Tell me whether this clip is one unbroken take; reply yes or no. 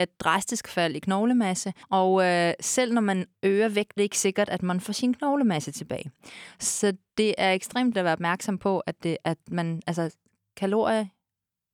no